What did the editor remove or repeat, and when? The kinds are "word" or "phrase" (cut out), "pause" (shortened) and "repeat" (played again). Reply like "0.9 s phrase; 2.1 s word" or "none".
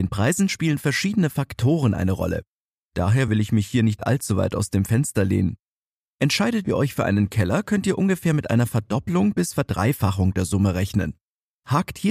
none